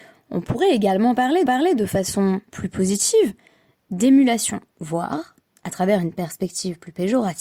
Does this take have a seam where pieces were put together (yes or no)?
yes